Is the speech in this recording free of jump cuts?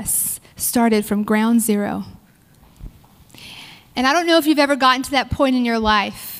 yes; 0 cuts

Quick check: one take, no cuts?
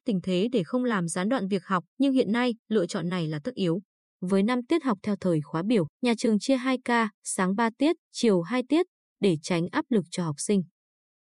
no; 6 cuts; at 1.9 s, 2.6 s, 3.9 s, 5.9 s, 7.1 s, 8.0 s

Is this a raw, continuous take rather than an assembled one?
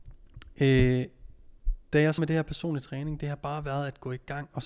no; 1 cut; at 2.2 s

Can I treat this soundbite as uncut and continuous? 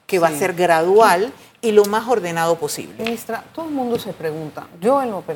yes; 0 cuts

